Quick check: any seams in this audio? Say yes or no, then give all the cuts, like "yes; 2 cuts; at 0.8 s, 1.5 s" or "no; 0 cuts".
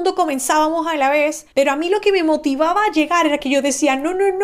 yes; 1 cut; at 1.5 s